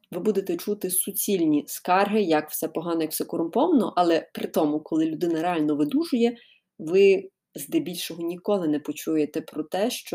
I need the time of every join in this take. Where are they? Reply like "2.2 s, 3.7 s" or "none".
none

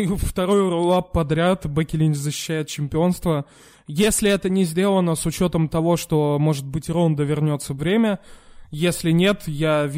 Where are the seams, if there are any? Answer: 7.8 s

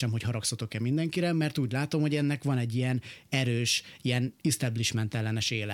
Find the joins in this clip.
none

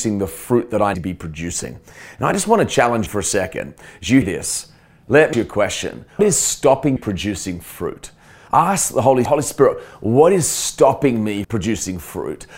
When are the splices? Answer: 0.9 s, 3.1 s, 4.2 s, 5.3 s, 6.2 s, 7.0 s, 9.3 s, 11.4 s

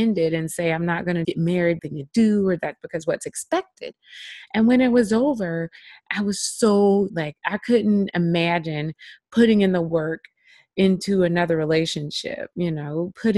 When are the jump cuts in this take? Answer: 1.2 s, 1.8 s, 7.1 s

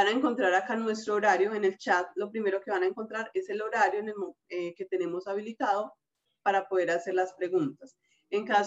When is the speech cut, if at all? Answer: none

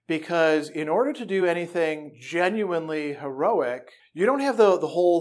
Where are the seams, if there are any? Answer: none

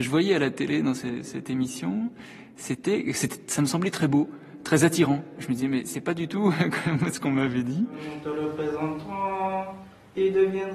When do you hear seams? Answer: none

